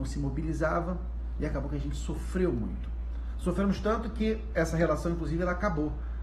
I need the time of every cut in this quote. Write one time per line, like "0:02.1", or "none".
none